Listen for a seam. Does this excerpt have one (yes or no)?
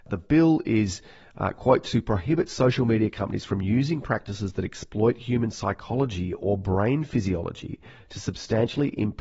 no